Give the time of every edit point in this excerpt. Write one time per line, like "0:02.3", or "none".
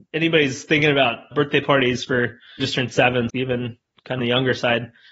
0:01.3
0:02.6
0:03.3
0:04.2